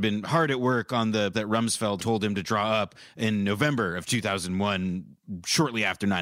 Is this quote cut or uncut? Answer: cut